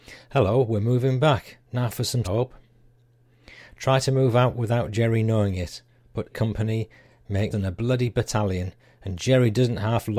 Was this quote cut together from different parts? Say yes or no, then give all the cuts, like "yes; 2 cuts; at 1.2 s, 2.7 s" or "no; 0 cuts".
yes; 4 cuts; at 1.6 s, 2.2 s, 6.3 s, 7.5 s